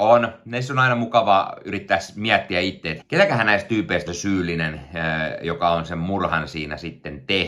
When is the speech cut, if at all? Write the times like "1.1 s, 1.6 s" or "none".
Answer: 3.0 s, 4.1 s